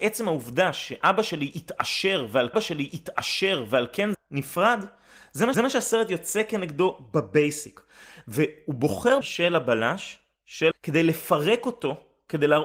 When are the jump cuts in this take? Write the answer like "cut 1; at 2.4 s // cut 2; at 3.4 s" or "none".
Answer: cut 1; at 2.5 s // cut 2; at 4.1 s // cut 3; at 5.5 s // cut 4; at 9.2 s // cut 5; at 10.7 s